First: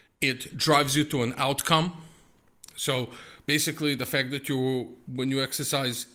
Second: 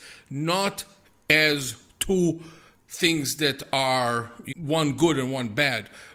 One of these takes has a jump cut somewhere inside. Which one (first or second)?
second